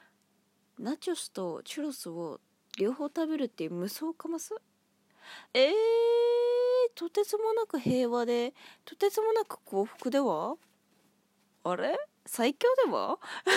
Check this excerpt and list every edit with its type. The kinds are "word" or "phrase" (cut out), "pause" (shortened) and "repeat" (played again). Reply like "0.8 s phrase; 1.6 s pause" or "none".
5.5 s pause